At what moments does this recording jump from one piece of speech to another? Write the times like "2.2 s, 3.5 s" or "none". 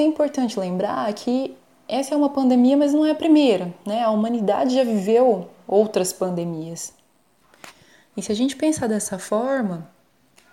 none